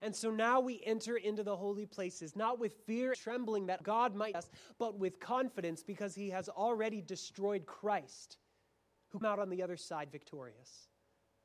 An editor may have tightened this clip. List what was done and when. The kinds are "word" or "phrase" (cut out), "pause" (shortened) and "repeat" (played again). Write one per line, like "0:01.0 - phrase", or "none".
0:03.1 - word
0:03.8 - word
0:04.3 - word
0:09.2 - word